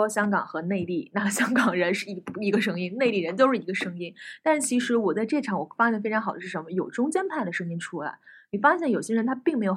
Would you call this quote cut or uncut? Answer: uncut